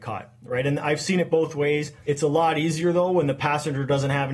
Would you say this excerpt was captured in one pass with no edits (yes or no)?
yes